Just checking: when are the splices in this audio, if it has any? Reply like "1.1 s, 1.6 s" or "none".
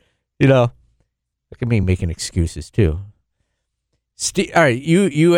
none